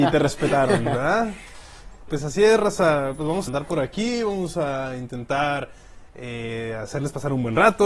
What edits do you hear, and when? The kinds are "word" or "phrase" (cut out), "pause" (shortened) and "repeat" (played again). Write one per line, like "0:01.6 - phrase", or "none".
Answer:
0:02.1 - word
0:03.5 - word